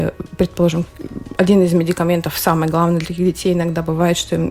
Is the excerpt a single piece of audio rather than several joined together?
yes; 0 cuts

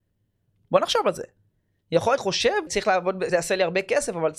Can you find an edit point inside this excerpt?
yes; 3 cuts; at 2.2 s, 2.7 s, 3.3 s

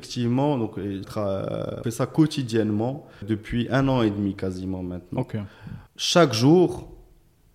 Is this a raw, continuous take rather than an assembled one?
no; 4 cuts; at 1.0 s, 1.8 s, 3.2 s, 5.9 s

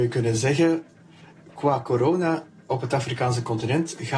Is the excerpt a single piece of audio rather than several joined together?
yes; 0 cuts

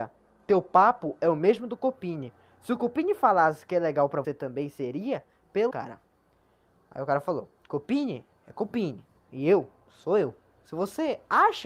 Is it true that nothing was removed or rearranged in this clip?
no; 2 cuts; at 4.2 s, 5.7 s

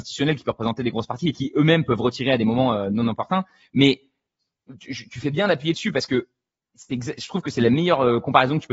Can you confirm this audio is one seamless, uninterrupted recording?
yes; 0 cuts

